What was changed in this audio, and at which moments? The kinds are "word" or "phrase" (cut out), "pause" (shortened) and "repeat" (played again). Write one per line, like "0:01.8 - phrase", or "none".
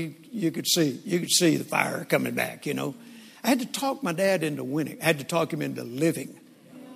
none